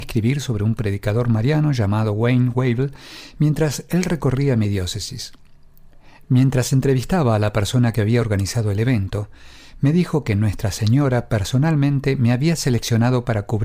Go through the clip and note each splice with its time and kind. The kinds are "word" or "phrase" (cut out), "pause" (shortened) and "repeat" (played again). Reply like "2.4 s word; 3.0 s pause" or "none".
none